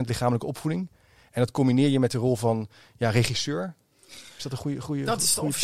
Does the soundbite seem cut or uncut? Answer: uncut